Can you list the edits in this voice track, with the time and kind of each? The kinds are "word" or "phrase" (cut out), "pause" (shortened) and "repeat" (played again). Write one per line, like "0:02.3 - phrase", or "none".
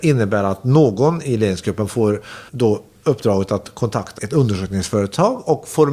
0:02.5 - word
0:04.2 - word

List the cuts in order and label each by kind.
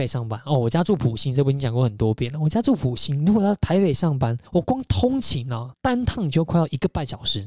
0:04.5 - pause
0:05.7 - word

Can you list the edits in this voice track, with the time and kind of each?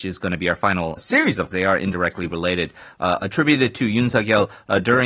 0:01.0 - word
0:01.5 - phrase

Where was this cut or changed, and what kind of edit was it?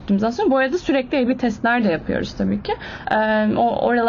none

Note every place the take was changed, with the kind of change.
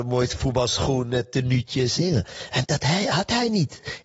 0:02.0 - phrase
0:02.6 - word

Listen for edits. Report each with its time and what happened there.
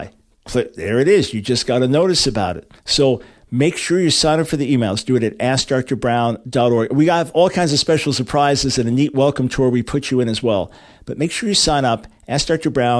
none

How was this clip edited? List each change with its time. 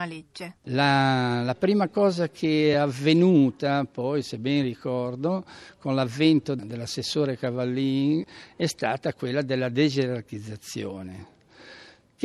none

